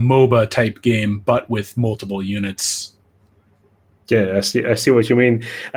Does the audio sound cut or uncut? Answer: uncut